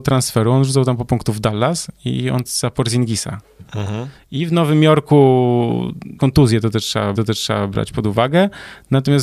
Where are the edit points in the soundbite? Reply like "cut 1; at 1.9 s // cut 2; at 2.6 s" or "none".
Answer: cut 1; at 1.1 s // cut 2; at 2.5 s // cut 3; at 3.7 s // cut 4; at 6.2 s // cut 5; at 7.1 s